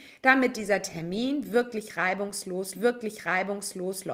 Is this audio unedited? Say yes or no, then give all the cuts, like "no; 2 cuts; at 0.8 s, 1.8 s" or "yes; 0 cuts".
no; 1 cut; at 2.7 s